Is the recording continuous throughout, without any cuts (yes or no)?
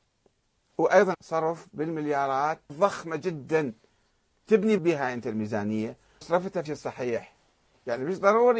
no